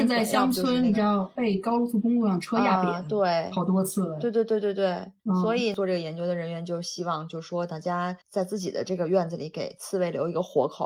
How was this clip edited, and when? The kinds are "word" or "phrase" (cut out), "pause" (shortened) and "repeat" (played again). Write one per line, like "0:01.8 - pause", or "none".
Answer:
0:05.2 - pause
0:08.2 - pause